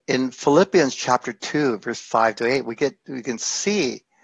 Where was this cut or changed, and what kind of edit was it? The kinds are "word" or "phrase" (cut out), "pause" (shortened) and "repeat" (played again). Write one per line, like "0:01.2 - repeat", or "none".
none